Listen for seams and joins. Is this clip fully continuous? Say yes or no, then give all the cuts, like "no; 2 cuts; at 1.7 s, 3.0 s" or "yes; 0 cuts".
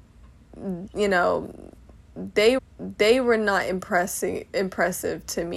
no; 1 cut; at 2.6 s